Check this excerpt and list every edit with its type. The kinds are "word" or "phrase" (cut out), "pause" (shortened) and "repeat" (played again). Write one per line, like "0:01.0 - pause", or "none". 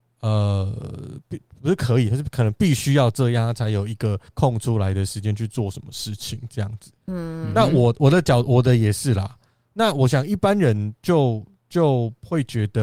0:04.3 - pause